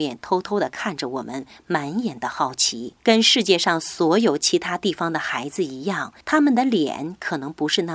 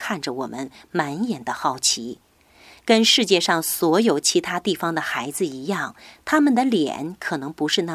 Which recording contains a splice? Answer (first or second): first